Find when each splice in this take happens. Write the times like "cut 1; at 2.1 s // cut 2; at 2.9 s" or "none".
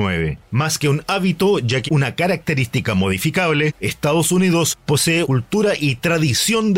cut 1; at 1.9 s // cut 2; at 5.2 s